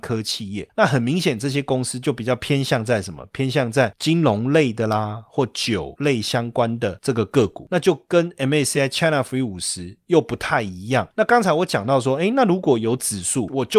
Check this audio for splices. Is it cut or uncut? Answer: uncut